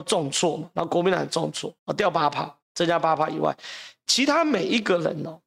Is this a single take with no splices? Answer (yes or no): no